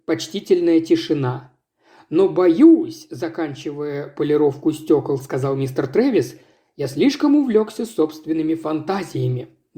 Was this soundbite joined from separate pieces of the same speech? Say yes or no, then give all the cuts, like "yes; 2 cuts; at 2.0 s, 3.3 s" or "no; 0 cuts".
no; 0 cuts